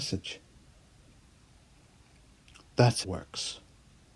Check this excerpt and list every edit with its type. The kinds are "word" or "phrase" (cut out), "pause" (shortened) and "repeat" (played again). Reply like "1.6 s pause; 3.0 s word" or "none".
3.0 s word